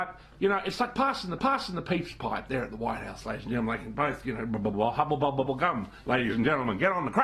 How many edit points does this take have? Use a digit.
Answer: 3